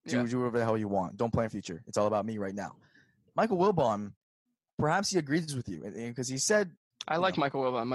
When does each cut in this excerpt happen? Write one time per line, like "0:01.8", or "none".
0:01.5